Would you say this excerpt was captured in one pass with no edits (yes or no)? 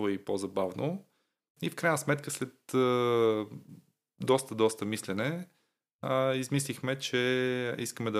yes